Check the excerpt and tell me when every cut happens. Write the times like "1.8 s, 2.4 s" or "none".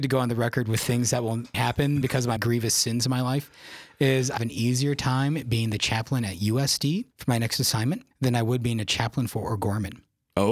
1.5 s, 2.0 s, 2.4 s, 4.4 s, 7.1 s, 8.1 s